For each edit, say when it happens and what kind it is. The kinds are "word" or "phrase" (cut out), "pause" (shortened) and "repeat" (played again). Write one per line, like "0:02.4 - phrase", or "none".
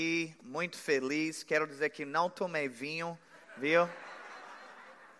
none